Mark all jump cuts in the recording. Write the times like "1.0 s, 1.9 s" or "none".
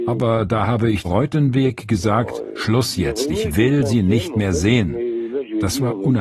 1.0 s

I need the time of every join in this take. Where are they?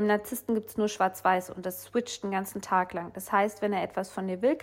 none

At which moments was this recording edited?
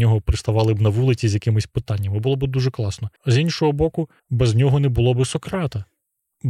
3.2 s, 4.2 s

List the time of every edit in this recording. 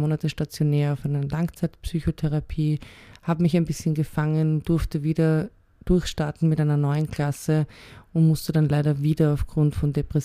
none

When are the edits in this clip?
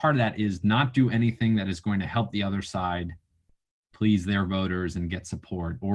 none

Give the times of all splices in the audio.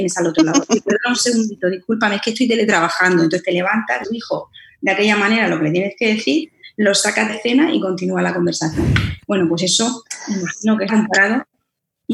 4.0 s, 7.3 s, 10.9 s

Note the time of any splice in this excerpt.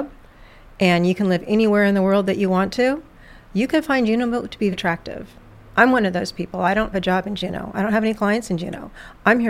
4.7 s, 6.9 s

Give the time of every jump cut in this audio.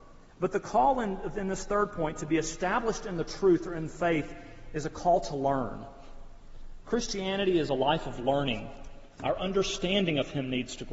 none

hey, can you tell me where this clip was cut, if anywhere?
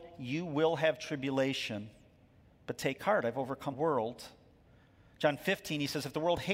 3.7 s

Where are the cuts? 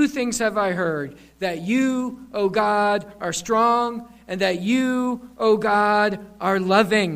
none

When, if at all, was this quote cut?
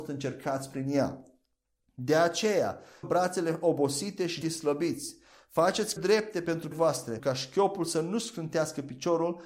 3.0 s, 4.4 s, 6.0 s, 6.7 s, 7.2 s

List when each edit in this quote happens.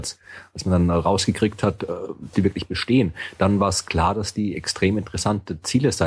2.3 s

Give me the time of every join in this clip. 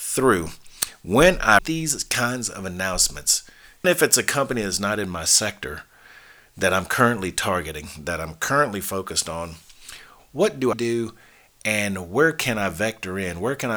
1.6 s, 3.8 s, 10.2 s, 10.7 s

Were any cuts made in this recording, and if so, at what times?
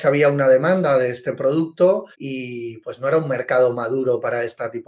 2.1 s

